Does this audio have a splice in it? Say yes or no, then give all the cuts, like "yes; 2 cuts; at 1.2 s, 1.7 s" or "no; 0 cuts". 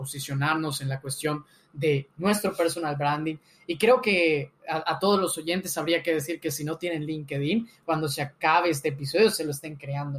no; 0 cuts